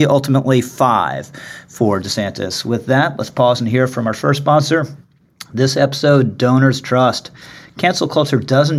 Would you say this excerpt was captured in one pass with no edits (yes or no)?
yes